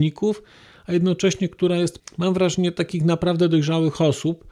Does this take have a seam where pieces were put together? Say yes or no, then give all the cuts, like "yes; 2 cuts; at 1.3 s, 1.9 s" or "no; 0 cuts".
yes; 1 cut; at 2.0 s